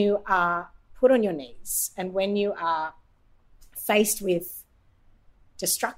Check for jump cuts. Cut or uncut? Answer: uncut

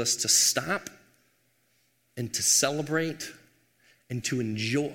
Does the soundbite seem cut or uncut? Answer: uncut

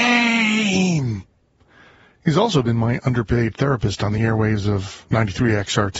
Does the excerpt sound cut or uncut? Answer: uncut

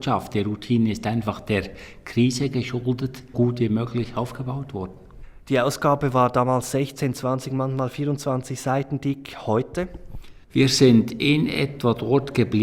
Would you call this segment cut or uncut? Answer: cut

